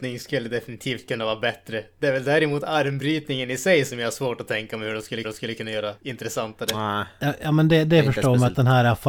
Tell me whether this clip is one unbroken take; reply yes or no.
no